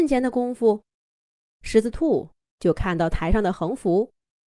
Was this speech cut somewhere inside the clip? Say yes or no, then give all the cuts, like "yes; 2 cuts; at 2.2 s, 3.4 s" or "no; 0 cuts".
no; 0 cuts